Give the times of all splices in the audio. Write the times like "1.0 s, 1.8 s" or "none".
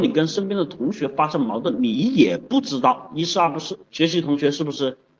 3.8 s